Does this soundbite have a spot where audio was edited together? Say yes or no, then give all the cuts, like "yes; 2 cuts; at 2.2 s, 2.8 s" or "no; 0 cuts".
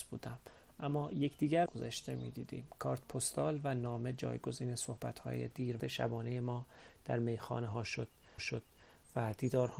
yes; 3 cuts; at 1.7 s, 5.8 s, 8.4 s